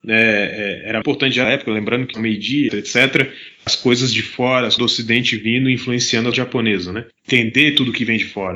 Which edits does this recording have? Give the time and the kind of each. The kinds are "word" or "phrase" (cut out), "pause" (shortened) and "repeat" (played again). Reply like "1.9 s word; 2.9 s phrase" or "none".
1.0 s word; 1.4 s word; 2.1 s word; 2.7 s word; 4.8 s word; 6.3 s word